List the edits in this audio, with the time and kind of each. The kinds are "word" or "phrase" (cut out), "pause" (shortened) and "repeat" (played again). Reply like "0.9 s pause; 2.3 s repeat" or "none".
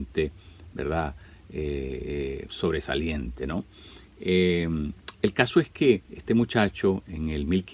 2.5 s word; 6.0 s pause